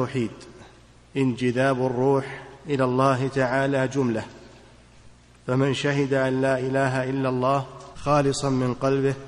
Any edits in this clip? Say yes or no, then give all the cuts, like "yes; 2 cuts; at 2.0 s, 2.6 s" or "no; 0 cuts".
no; 0 cuts